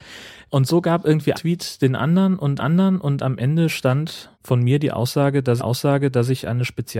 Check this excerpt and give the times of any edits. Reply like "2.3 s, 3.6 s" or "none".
1.3 s, 2.6 s, 4.3 s, 5.6 s